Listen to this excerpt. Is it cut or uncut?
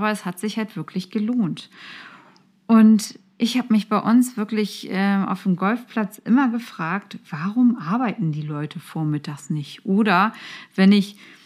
uncut